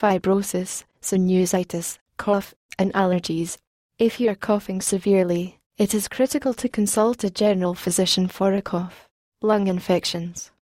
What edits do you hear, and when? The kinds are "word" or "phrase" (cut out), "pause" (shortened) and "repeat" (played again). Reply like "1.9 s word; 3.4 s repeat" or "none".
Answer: none